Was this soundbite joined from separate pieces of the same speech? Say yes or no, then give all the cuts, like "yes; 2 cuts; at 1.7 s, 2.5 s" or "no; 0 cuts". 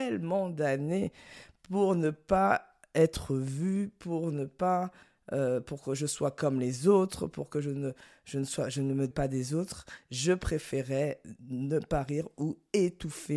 yes; 1 cut; at 9.1 s